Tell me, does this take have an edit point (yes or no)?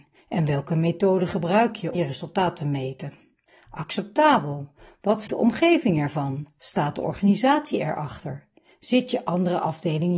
yes